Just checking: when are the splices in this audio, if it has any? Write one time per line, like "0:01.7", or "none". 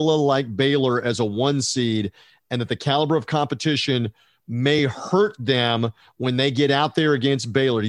none